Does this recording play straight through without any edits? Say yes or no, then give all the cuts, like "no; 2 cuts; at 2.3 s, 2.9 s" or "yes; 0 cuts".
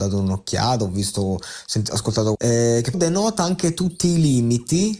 no; 2 cuts; at 2.3 s, 2.9 s